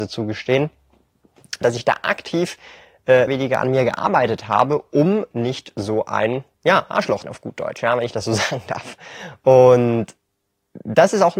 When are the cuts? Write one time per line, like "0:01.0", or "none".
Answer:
0:01.6
0:03.3
0:05.3
0:06.5
0:07.2